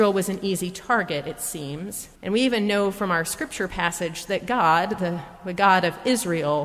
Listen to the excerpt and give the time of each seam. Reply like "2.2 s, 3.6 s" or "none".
2.2 s